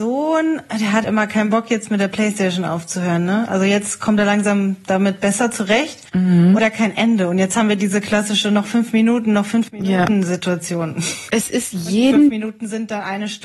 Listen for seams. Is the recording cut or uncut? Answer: cut